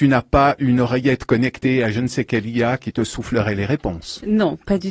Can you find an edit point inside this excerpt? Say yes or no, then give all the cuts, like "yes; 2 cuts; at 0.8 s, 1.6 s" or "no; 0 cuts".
no; 0 cuts